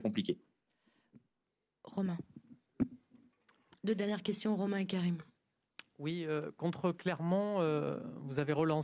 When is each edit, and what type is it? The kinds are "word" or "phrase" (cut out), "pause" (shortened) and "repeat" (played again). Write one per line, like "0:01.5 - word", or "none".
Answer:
none